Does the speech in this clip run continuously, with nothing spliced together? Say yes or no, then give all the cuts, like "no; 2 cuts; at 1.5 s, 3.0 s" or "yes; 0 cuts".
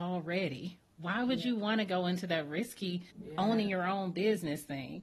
no; 1 cut; at 3.1 s